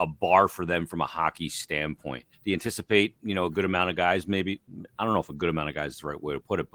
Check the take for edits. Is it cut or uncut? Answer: cut